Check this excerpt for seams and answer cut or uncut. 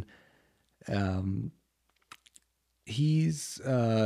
uncut